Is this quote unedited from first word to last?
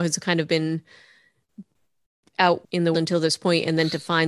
no; 2 cuts; at 2.6 s, 2.9 s

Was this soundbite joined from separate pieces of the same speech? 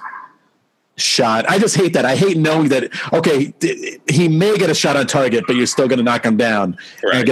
no; 0 cuts

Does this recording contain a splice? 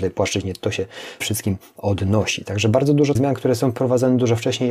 yes; 2 cuts; at 1.2 s, 3.2 s

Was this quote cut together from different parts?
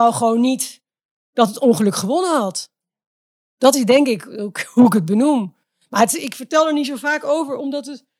no; 0 cuts

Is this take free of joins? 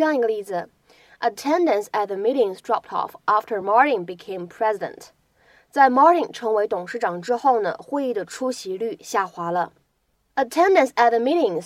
yes; 0 cuts

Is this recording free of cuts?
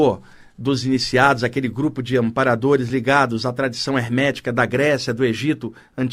yes; 0 cuts

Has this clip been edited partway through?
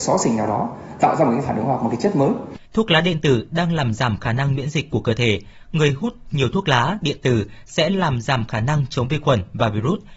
yes; 1 cut; at 2.7 s

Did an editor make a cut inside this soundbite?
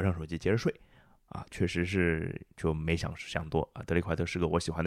yes; 2 cuts; at 1.5 s, 2.5 s

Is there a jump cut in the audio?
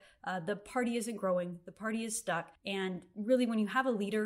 yes; 1 cut; at 2.6 s

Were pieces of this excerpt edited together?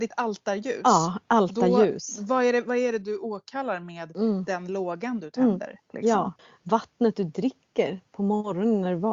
yes; 1 cut; at 6.4 s

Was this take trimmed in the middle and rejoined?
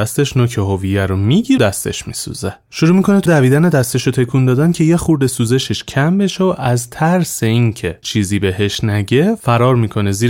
yes; 3 cuts; at 1.6 s, 3.3 s, 8.0 s

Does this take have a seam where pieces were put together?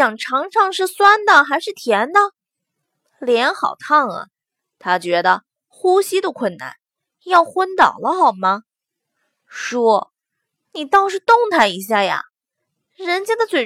no; 0 cuts

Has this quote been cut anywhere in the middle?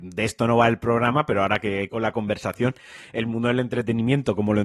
yes; 1 cut; at 1.9 s

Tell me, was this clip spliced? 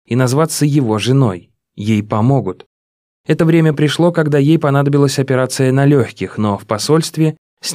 no; 0 cuts

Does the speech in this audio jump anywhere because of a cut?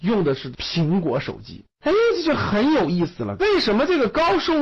yes; 1 cut; at 1.7 s

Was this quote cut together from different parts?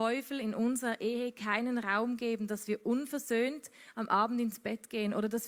no; 0 cuts

